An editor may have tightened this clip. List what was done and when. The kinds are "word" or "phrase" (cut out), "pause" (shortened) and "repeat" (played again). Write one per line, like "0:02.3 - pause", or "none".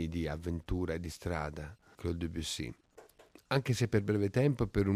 0:01.9 - word